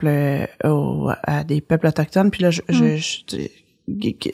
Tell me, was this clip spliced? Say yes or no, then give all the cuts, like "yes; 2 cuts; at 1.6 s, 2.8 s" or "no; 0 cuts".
no; 0 cuts